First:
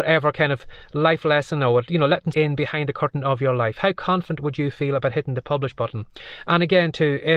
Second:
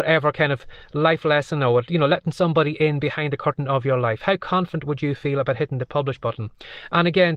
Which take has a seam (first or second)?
first